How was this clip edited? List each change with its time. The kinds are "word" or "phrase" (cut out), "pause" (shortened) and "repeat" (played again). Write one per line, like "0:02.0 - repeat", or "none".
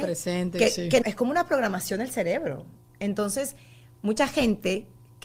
0:01.0 - word